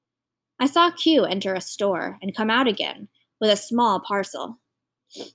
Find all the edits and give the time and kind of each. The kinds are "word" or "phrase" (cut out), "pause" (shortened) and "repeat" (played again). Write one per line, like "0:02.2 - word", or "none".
none